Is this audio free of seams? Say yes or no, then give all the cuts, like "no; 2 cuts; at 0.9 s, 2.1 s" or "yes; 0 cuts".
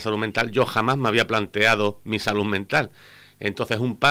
yes; 0 cuts